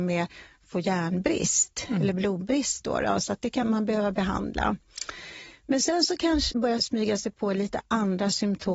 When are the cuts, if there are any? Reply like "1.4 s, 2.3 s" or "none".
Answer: 3.6 s, 6.5 s